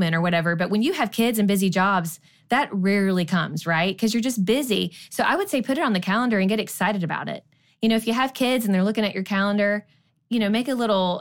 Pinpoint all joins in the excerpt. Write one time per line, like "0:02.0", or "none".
none